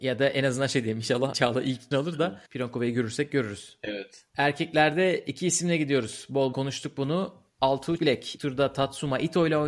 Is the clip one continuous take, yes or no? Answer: no